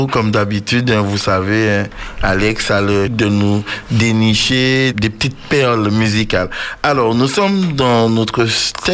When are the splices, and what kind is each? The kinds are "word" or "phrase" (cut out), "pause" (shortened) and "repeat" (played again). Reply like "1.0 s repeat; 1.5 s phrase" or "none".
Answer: 3.1 s word; 4.9 s word